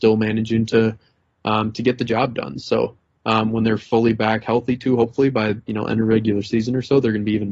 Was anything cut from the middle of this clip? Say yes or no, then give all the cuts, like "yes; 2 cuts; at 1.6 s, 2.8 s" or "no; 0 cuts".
no; 0 cuts